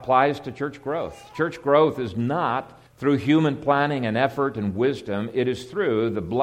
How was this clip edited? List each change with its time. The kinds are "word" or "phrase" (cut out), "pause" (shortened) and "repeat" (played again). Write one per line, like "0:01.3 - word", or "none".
0:02.9 - pause